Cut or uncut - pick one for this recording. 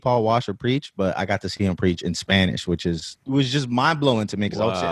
cut